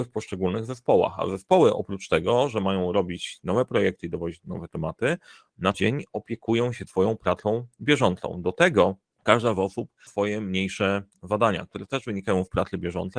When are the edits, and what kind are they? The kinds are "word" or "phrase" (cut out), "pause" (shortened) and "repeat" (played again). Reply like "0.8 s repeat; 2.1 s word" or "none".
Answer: 5.7 s word; 6.9 s word; 9.1 s pause; 10.1 s word